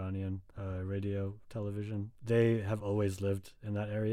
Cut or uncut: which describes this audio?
uncut